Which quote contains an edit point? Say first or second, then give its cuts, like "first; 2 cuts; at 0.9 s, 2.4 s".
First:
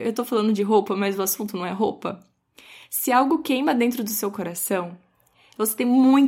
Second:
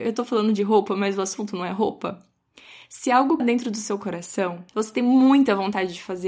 second; 2 cuts; at 3.4 s, 4.7 s